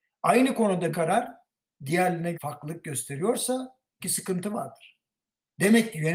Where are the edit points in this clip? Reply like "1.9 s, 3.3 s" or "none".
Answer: 0.9 s, 2.3 s, 4.0 s